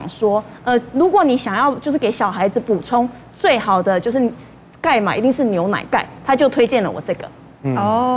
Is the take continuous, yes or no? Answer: yes